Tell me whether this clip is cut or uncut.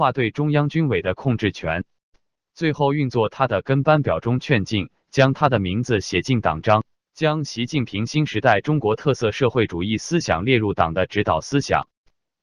cut